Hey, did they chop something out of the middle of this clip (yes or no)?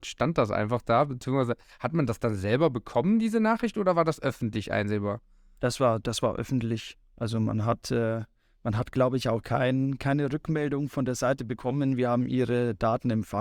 no